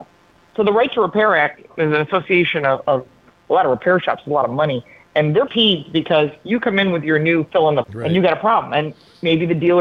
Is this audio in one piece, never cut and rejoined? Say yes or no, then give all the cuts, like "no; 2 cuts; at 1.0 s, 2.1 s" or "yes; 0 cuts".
no; 2 cuts; at 5.5 s, 7.8 s